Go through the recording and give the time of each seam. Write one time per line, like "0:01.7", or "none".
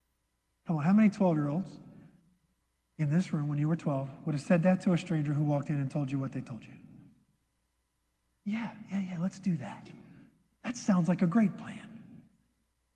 none